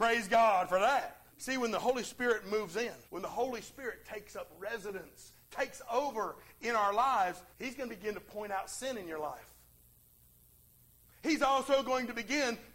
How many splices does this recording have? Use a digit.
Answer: 3